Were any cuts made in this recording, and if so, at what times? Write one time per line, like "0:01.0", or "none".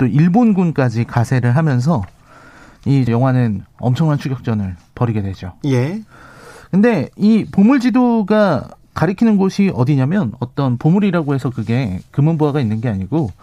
0:03.1